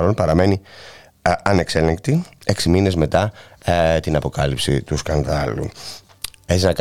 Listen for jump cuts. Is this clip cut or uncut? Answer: uncut